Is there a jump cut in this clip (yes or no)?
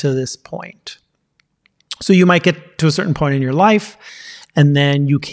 no